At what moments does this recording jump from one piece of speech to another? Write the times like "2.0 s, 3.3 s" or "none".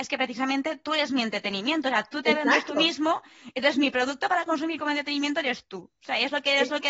none